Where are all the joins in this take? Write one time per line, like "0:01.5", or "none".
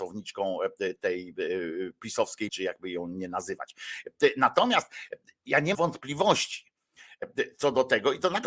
0:02.5
0:05.7